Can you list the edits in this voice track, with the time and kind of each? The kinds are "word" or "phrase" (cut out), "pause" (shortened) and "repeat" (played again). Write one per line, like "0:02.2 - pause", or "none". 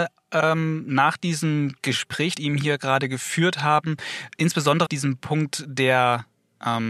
0:02.3 - phrase
0:04.9 - word